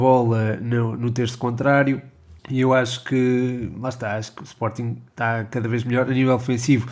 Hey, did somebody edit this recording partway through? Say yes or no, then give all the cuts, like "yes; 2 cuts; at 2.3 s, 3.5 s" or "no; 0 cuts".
yes; 2 cuts; at 2.4 s, 5.1 s